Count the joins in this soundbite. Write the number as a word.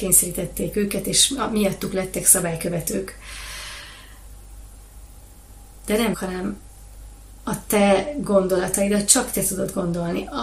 one